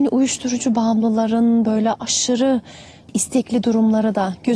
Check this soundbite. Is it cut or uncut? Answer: uncut